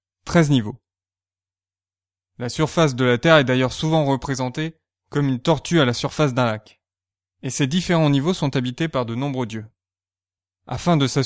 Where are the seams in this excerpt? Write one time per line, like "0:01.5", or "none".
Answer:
none

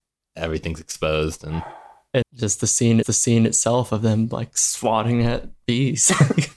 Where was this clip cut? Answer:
0:02.2
0:03.0

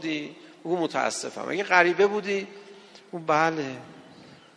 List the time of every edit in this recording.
none

